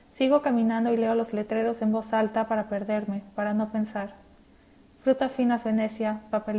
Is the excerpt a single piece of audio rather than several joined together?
yes; 0 cuts

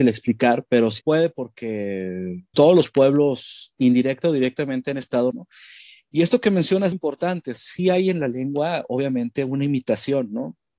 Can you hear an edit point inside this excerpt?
yes; 5 cuts; at 1.0 s, 2.5 s, 5.3 s, 6.9 s, 7.5 s

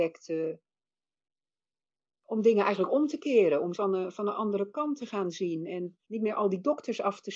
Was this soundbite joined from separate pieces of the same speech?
yes; 2 cuts; at 3.7 s, 6.0 s

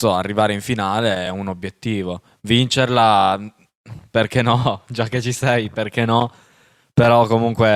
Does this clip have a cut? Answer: no; 0 cuts

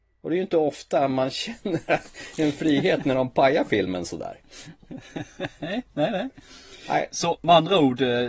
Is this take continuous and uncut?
no; 1 cut; at 4.4 s

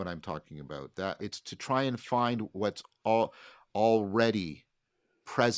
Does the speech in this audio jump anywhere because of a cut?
yes; 1 cut; at 1.2 s

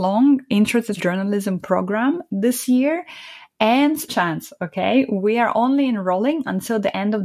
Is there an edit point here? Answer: yes; 2 cuts; at 1.0 s, 4.1 s

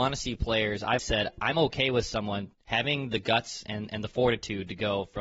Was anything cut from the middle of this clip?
yes; 3 cuts; at 1.0 s, 2.5 s, 3.7 s

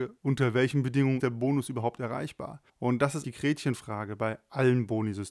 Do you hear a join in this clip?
yes; 3 cuts; at 1.2 s, 2.7 s, 3.2 s

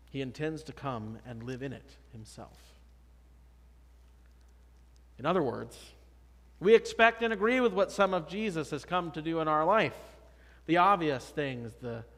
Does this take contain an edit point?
no; 0 cuts

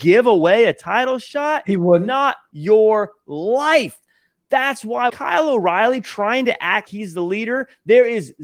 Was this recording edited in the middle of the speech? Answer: yes; 3 cuts; at 2.5 s, 5.1 s, 6.9 s

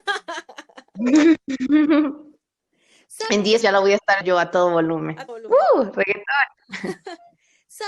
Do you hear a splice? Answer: yes; 3 cuts; at 3.6 s, 4.2 s, 5.3 s

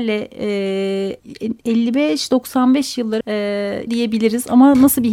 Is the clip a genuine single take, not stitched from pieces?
no; 3 cuts; at 1.2 s, 3.2 s, 3.9 s

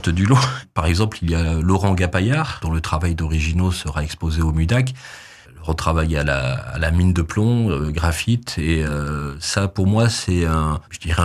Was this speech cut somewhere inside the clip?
no; 0 cuts

